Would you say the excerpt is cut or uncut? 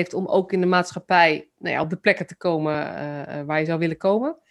uncut